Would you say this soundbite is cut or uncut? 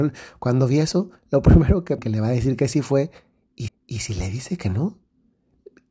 cut